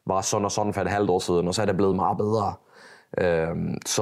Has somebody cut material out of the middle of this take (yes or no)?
no